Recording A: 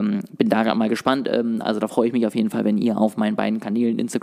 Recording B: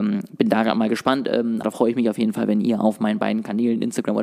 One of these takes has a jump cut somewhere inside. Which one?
B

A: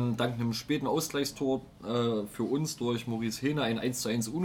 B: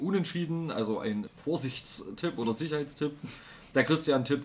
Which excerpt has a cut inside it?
B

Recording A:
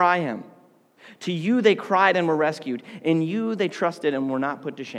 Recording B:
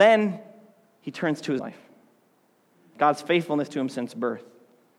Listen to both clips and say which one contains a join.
B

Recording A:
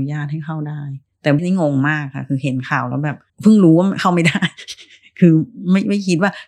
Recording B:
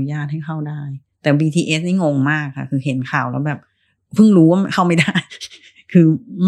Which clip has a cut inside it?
A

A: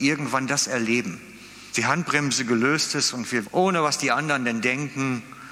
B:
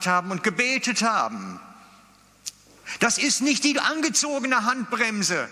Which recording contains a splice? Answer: A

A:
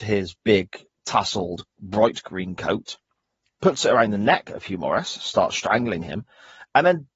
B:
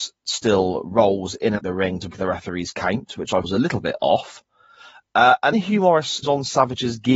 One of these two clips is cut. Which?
B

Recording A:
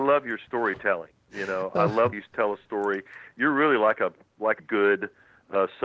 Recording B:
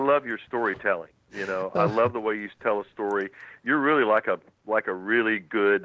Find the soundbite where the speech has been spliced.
A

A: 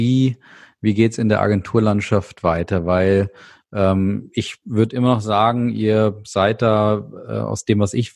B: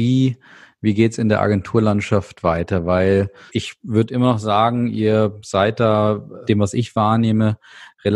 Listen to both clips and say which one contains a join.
B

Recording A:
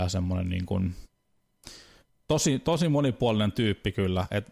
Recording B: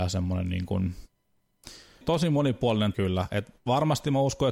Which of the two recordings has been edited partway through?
B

